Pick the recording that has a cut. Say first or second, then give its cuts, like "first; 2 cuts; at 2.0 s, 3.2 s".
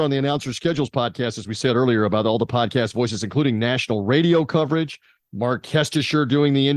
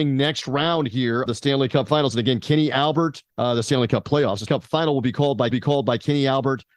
second; 4 cuts; at 1.3 s, 3.3 s, 4.5 s, 5.5 s